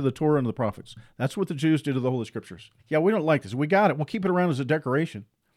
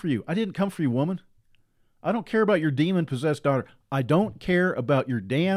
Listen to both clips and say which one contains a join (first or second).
first